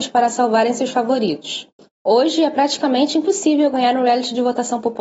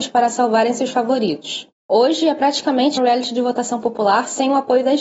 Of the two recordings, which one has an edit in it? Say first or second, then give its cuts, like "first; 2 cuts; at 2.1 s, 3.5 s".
second; 2 cuts; at 1.8 s, 3.0 s